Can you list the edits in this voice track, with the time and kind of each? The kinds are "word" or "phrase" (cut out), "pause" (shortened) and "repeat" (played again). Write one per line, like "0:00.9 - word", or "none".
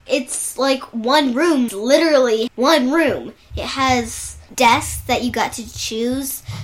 0:01.7 - word
0:02.5 - word
0:04.5 - word